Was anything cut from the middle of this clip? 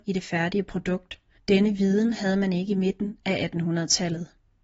yes; 1 cut; at 1.4 s

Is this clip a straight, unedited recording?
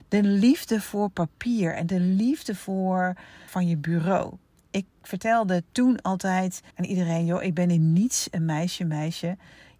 no; 2 cuts; at 3.5 s, 6.7 s

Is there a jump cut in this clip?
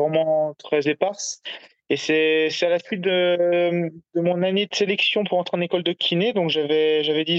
no; 0 cuts

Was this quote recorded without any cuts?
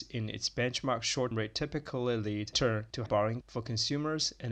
no; 4 cuts; at 1.3 s, 2.5 s, 3.1 s, 3.4 s

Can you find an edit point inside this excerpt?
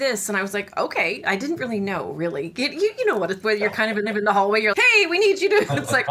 yes; 3 cuts; at 3.4 s, 4.1 s, 4.7 s

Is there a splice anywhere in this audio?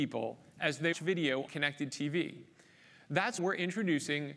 yes; 3 cuts; at 0.9 s, 1.5 s, 3.4 s

